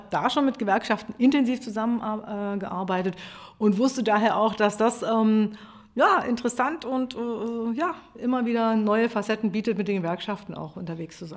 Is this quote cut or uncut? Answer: uncut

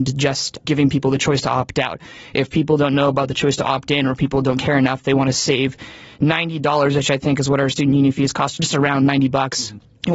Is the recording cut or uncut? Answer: uncut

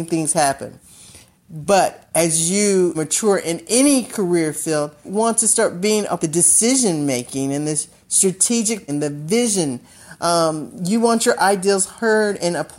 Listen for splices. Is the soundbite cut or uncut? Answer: cut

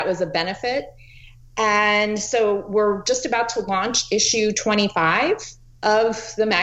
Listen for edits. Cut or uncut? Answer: uncut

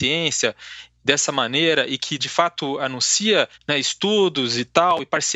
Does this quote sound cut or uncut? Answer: cut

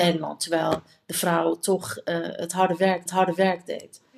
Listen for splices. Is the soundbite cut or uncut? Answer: cut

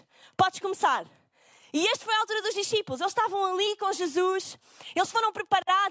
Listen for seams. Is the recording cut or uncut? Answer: uncut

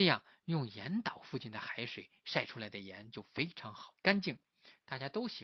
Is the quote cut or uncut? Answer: cut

